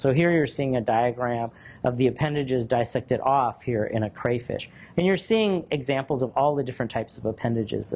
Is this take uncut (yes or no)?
yes